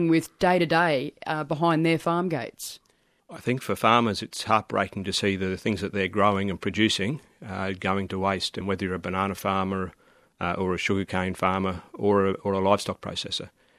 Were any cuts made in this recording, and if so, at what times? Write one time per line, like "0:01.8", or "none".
none

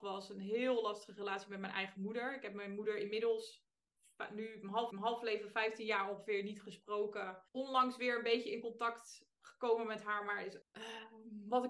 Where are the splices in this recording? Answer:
0:04.9
0:07.5
0:10.6

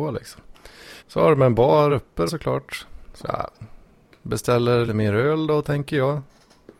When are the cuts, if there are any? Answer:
0:01.0
0:01.9
0:02.3
0:04.9

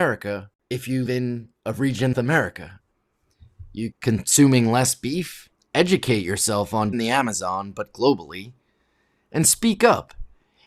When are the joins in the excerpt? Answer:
0:01.1
0:01.6
0:02.1
0:03.9
0:05.5
0:06.9

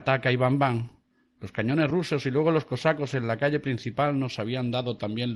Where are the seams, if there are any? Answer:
none

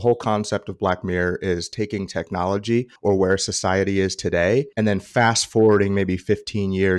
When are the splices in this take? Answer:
0:03.0
0:04.7

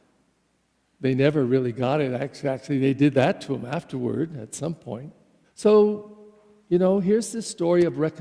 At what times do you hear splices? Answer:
0:05.4

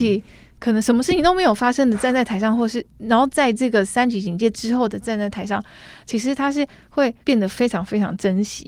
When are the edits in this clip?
0:07.2

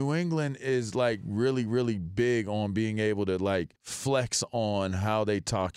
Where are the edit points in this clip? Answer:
0:03.8

